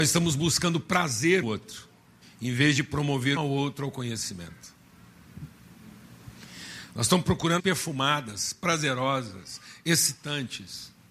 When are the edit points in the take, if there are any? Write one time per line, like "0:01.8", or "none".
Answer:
0:01.4
0:02.2
0:03.4
0:07.6